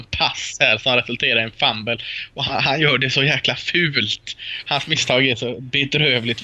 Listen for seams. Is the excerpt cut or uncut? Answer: uncut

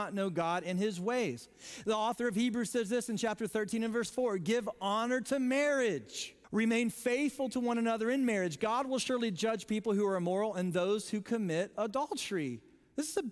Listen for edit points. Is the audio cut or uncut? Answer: cut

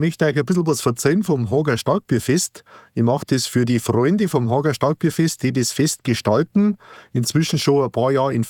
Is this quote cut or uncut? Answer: uncut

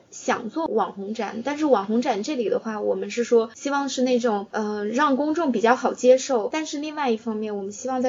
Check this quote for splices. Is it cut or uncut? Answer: uncut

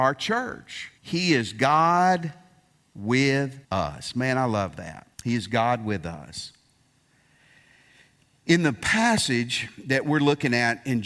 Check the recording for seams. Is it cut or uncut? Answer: cut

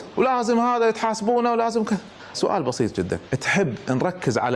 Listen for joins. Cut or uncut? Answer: cut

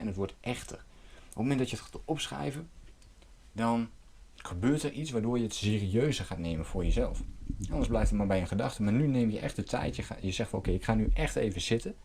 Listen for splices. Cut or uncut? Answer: uncut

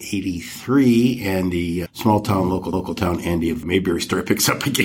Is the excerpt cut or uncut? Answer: cut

